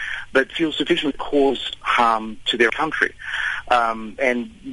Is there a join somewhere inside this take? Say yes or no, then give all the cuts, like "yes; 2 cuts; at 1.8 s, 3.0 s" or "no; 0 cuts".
yes; 2 cuts; at 1.1 s, 2.7 s